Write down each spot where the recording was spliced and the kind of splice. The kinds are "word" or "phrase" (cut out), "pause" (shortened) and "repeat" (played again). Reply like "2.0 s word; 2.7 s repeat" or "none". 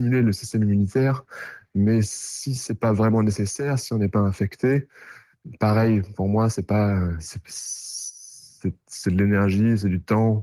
none

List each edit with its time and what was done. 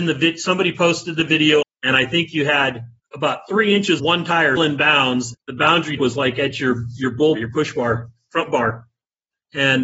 1.6 s word; 3.0 s word; 4.0 s word; 4.6 s word; 5.3 s word; 6.0 s word; 7.4 s word

